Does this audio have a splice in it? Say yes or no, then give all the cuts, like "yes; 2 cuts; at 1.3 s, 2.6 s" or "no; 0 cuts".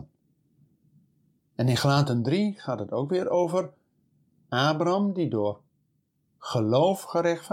no; 0 cuts